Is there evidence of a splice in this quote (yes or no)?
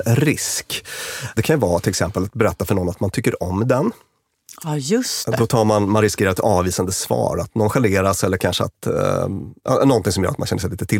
no